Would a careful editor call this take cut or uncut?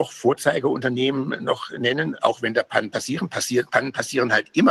uncut